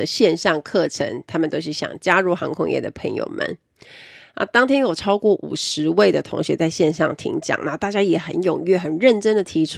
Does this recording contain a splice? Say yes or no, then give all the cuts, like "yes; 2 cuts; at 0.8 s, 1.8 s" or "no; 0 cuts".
no; 0 cuts